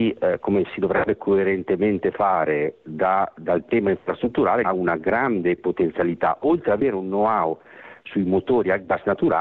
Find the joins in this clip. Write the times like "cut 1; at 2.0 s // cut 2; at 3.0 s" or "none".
cut 1; at 4.6 s